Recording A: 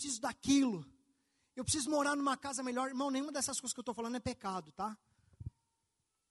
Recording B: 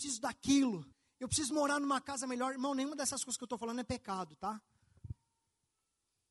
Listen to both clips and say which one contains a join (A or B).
B